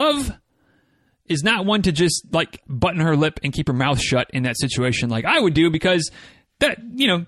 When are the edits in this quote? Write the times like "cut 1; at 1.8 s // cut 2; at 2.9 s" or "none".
none